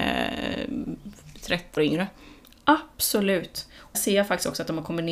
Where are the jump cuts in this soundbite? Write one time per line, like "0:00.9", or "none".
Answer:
0:01.8
0:03.9